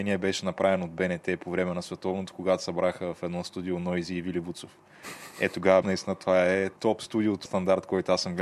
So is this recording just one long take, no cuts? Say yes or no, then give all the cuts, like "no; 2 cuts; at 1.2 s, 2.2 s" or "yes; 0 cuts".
no; 3 cuts; at 5.8 s, 6.8 s, 7.4 s